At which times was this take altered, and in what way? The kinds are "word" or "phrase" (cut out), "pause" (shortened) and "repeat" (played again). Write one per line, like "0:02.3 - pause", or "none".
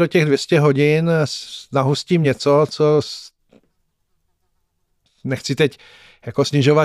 none